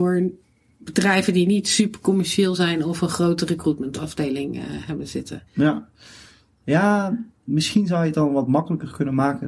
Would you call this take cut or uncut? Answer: cut